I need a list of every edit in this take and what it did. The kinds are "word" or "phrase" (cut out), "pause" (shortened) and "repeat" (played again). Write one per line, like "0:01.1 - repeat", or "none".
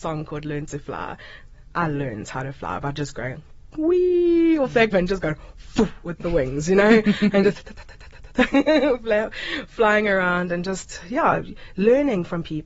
0:04.9 - word

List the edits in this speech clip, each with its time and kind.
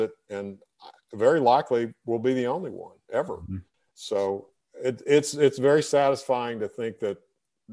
none

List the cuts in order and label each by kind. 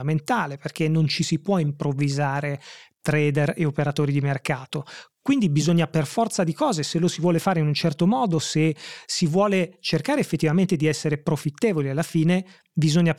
none

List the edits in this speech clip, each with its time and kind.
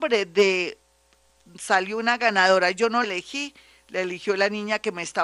0:03.0 - word

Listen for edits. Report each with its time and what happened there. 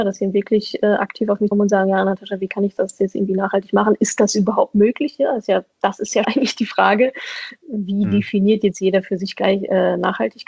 0:01.5 - word
0:05.7 - word
0:06.2 - word

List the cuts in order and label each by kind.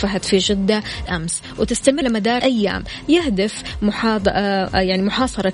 0:01.1 - word
0:02.0 - word
0:02.4 - word

